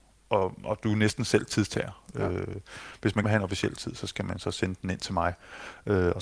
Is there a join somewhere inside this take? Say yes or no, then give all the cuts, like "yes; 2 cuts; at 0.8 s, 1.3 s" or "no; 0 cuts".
yes; 1 cut; at 3.2 s